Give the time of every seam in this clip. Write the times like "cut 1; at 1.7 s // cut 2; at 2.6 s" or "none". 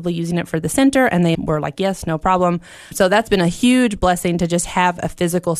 cut 1; at 1.3 s // cut 2; at 2.9 s